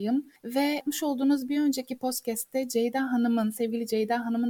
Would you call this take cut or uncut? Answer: uncut